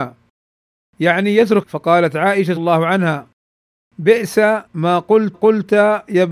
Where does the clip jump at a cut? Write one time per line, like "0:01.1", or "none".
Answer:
0:01.6
0:02.6
0:04.7
0:05.3